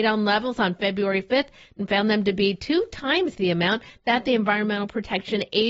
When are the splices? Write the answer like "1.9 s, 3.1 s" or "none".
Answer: none